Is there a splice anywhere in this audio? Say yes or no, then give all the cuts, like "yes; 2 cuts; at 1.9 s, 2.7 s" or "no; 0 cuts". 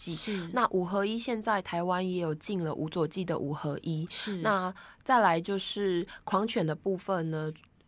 no; 0 cuts